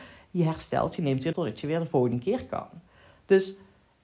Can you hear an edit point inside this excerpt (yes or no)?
yes